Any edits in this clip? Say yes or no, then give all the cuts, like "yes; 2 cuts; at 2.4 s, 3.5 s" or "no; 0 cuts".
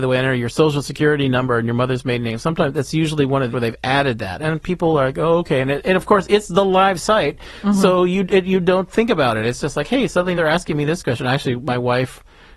yes; 2 cuts; at 3.5 s, 10.4 s